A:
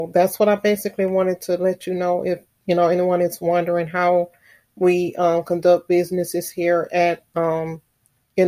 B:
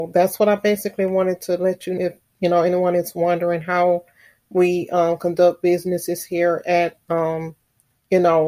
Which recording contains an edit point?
B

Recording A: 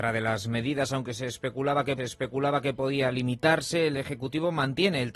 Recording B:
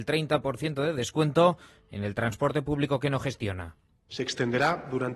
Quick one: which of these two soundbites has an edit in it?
A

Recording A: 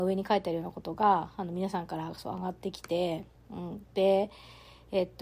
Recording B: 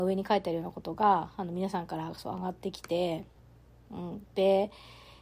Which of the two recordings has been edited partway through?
A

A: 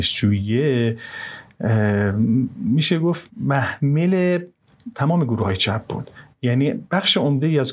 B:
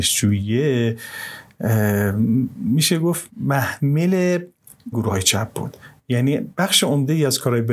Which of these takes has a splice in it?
B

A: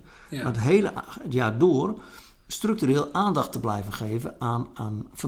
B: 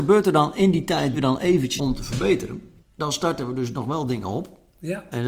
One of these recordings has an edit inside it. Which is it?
B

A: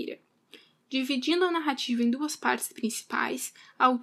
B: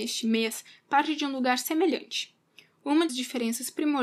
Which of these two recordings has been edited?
B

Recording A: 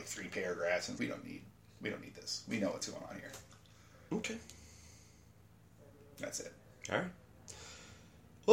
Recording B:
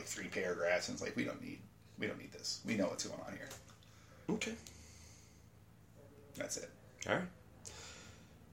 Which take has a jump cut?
A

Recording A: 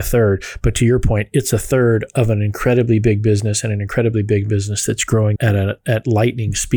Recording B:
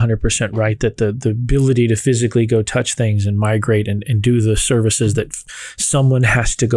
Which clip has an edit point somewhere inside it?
A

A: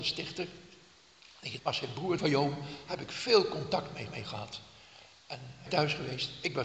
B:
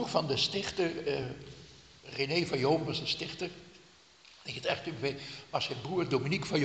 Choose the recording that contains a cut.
A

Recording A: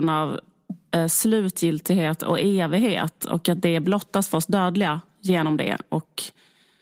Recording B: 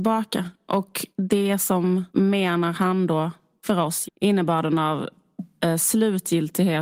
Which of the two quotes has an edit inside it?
B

